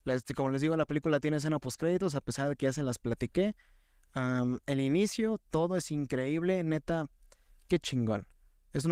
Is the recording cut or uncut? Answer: uncut